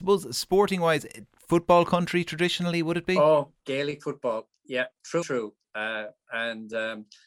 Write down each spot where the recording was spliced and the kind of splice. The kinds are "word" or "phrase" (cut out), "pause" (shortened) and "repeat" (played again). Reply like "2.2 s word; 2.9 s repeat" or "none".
3.6 s pause; 5.2 s word